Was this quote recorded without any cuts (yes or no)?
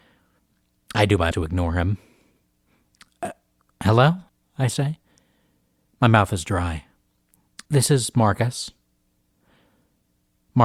no